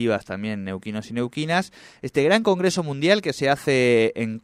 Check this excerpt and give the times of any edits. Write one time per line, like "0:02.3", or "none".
none